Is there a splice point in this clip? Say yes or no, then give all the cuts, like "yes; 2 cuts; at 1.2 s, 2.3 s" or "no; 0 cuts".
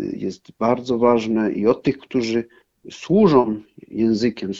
no; 0 cuts